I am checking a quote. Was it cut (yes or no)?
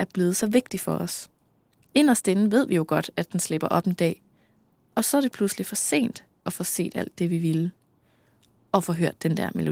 no